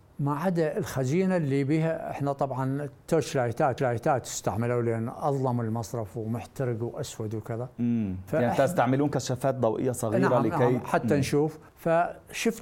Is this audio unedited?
no; 2 cuts; at 3.8 s, 11.7 s

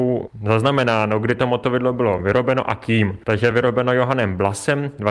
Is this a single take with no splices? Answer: yes; 0 cuts

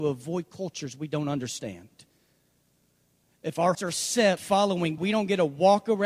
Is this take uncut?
no; 3 cuts; at 3.7 s, 4.4 s, 5.0 s

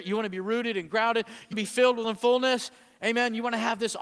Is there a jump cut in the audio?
yes; 2 cuts; at 1.5 s, 2.0 s

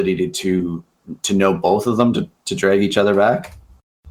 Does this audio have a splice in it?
no; 0 cuts

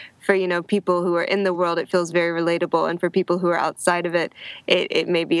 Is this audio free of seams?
yes; 0 cuts

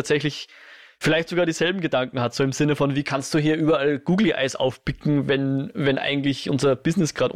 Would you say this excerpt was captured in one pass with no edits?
yes; 0 cuts

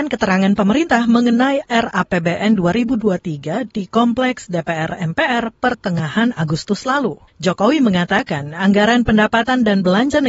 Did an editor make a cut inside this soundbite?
no; 0 cuts

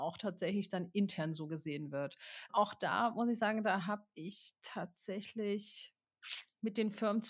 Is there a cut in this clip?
no; 0 cuts

